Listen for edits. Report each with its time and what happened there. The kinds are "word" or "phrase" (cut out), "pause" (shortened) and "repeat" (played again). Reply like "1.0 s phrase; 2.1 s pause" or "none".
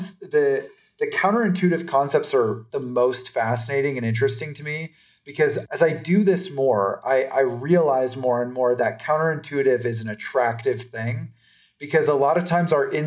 2.7 s word

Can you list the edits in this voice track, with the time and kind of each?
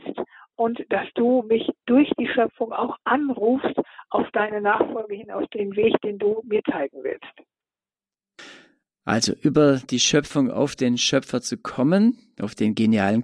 none

